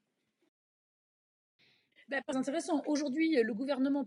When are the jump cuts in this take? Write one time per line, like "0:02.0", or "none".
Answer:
0:02.3